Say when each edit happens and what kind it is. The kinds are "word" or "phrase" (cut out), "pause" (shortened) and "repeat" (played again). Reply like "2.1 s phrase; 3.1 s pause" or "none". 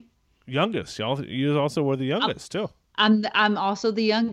none